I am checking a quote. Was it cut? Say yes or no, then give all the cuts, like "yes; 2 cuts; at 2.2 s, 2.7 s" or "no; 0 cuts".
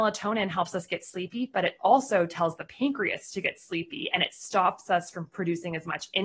no; 0 cuts